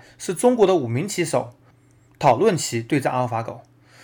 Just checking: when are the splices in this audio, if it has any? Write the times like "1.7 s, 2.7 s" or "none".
none